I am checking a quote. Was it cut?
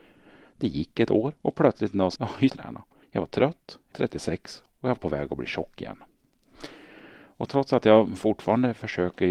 yes; 7 cuts; at 1.4 s, 2.2 s, 2.5 s, 3.0 s, 3.9 s, 5.0 s, 7.5 s

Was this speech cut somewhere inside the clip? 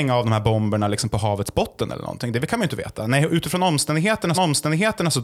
yes; 1 cut; at 4.3 s

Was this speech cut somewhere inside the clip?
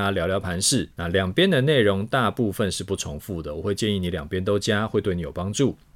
yes; 1 cut; at 0.9 s

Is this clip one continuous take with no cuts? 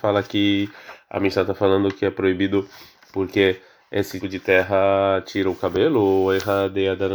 no; 1 cut; at 4.2 s

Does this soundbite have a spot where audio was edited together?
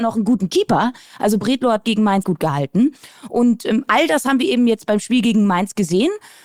yes; 1 cut; at 2.2 s

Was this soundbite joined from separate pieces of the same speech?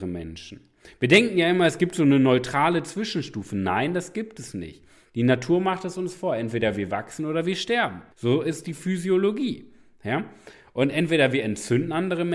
yes; 1 cut; at 8.1 s

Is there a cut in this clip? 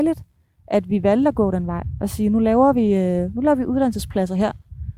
no; 0 cuts

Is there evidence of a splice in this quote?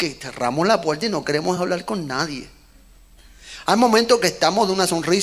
no; 0 cuts

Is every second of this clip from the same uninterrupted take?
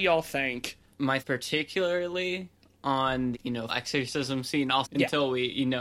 no; 4 cuts; at 1.2 s, 3.3 s, 3.7 s, 4.8 s

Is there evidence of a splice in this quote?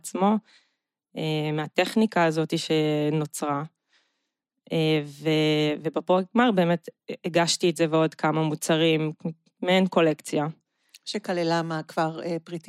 no; 0 cuts

